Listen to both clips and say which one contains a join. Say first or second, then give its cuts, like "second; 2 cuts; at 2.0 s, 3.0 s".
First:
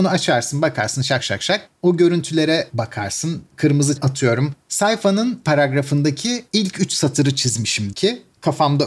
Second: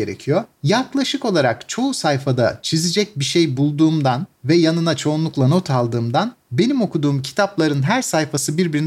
first; 4 cuts; at 1.2 s, 4.0 s, 5.4 s, 7.9 s